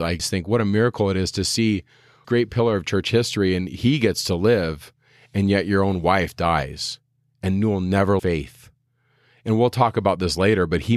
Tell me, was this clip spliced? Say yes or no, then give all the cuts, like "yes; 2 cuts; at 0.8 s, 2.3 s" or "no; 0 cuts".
yes; 2 cuts; at 2.2 s, 8.2 s